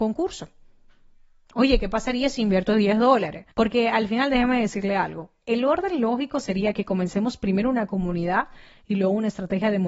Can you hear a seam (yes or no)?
yes